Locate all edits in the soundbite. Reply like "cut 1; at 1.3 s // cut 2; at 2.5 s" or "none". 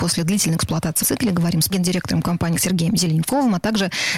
cut 1; at 1.0 s // cut 2; at 1.7 s // cut 3; at 2.5 s

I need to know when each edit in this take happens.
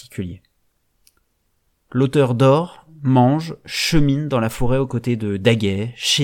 none

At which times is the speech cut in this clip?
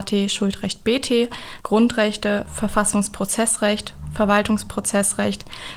cut 1; at 1.6 s

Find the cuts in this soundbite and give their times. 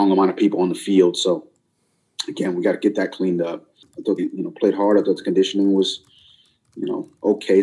cut 1; at 4.2 s

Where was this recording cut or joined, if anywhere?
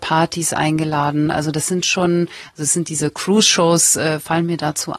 none

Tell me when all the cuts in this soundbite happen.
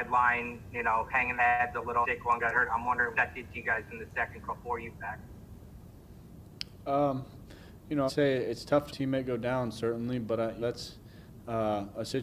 cut 1; at 1.4 s // cut 2; at 2.0 s // cut 3; at 3.1 s // cut 4; at 4.4 s // cut 5; at 4.9 s // cut 6; at 8.1 s // cut 7; at 8.9 s // cut 8; at 10.6 s

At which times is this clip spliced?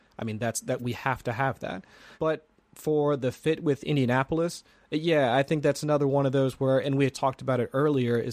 cut 1; at 2.2 s

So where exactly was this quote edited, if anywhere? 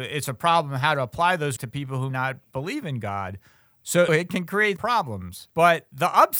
cut 1; at 1.6 s // cut 2; at 2.1 s // cut 3; at 4.1 s // cut 4; at 4.8 s // cut 5; at 5.5 s

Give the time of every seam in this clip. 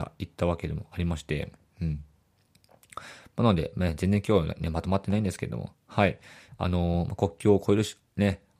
none

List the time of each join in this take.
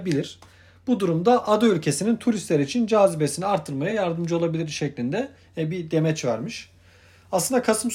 none

